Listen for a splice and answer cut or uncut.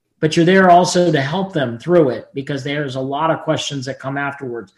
uncut